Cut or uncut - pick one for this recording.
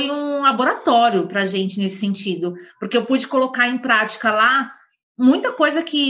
uncut